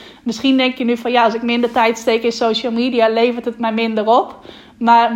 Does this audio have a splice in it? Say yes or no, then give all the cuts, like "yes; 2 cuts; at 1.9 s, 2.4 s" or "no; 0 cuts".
no; 0 cuts